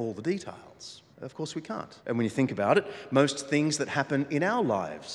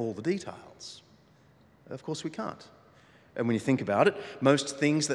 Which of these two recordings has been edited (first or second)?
first